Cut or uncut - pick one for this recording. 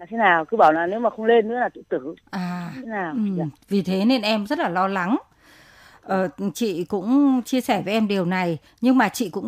cut